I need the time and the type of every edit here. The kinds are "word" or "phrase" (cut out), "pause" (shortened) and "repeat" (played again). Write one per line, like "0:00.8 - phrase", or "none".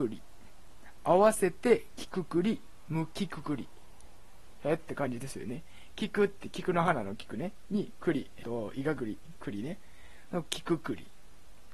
0:08.4 - word

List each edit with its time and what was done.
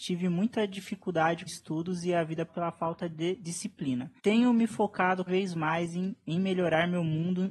0:01.5 - word
0:02.5 - word
0:04.2 - pause
0:05.3 - word

